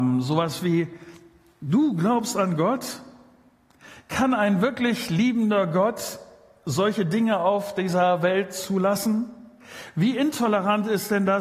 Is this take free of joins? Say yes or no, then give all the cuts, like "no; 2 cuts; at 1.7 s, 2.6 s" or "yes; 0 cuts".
yes; 0 cuts